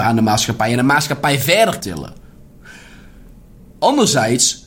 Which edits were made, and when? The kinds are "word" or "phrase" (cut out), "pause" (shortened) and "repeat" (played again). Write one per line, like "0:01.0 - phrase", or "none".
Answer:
0:01.8 - word